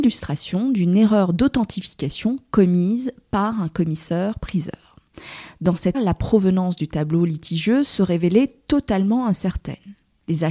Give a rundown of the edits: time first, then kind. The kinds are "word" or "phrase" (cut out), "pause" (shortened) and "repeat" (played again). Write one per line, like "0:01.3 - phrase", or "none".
0:05.9 - word